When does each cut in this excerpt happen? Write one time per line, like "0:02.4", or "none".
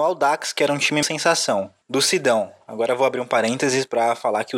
0:01.0
0:01.8